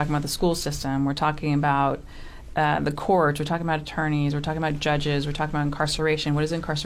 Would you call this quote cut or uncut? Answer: cut